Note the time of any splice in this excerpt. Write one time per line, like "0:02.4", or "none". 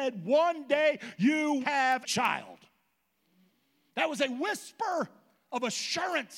0:01.6
0:02.0